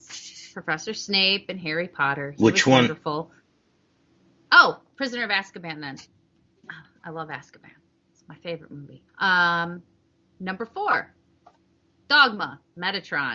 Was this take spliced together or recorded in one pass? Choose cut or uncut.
cut